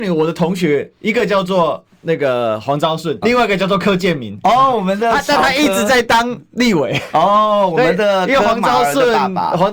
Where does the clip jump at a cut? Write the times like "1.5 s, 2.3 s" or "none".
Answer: 3.2 s